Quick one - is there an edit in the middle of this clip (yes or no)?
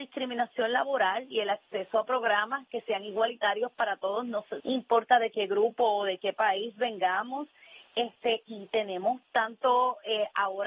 yes